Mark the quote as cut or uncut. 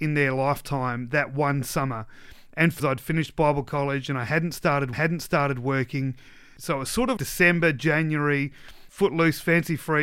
cut